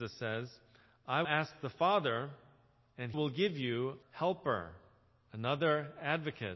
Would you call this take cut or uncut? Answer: cut